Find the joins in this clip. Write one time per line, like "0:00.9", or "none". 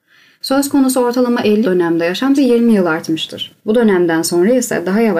0:01.6
0:02.3
0:03.6